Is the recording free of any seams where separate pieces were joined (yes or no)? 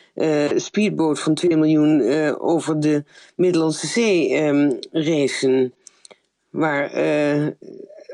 yes